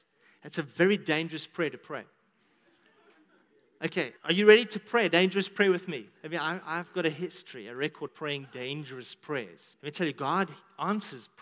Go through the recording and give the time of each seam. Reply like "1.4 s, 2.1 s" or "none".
4.2 s, 6.1 s, 8.1 s, 9.7 s